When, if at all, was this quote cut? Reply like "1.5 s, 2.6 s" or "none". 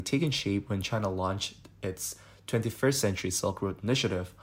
none